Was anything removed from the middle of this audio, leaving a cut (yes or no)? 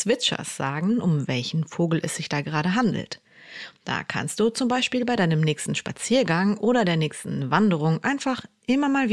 no